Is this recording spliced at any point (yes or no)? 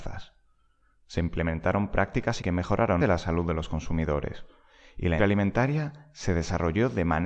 yes